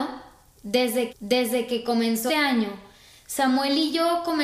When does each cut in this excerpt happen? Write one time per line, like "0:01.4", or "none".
0:01.1
0:02.3